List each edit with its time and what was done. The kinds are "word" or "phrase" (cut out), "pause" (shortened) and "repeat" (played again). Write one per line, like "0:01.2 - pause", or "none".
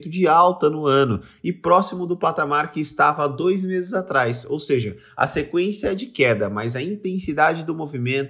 none